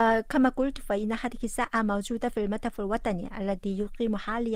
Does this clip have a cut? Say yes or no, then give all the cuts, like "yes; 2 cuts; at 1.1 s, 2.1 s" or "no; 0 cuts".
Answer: no; 0 cuts